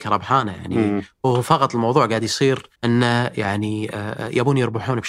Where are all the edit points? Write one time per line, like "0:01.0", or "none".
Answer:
0:02.7